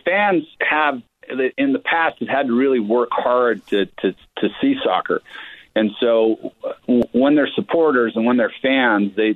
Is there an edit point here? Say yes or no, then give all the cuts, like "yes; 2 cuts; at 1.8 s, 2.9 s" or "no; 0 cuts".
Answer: no; 0 cuts